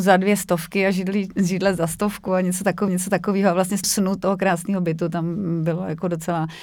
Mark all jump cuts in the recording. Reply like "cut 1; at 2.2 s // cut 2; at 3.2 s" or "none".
cut 1; at 2.9 s // cut 2; at 3.8 s